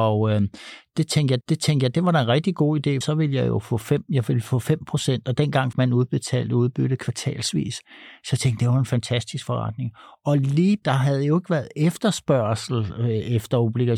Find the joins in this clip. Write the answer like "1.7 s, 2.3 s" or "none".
1.4 s, 3.0 s, 5.7 s, 10.8 s